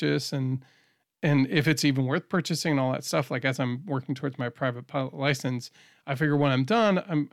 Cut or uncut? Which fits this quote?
uncut